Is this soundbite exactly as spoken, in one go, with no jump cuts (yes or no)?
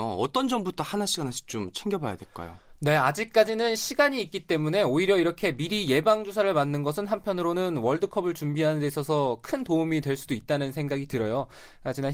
yes